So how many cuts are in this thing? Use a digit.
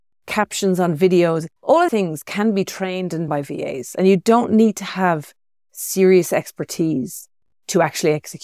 3